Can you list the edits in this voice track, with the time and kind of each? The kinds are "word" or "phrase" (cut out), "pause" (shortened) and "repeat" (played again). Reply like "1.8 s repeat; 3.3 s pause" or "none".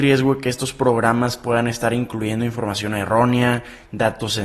none